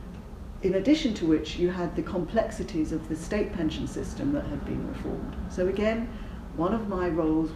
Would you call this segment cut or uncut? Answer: uncut